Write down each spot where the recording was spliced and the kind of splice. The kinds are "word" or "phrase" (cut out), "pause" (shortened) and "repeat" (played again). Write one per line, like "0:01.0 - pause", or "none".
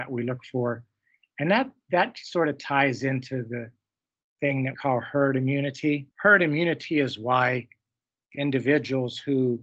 0:04.7 - word
0:06.1 - pause